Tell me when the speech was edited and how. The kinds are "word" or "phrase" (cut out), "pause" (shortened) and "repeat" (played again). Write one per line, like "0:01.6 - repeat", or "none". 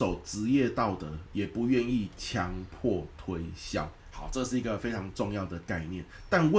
0:04.0 - pause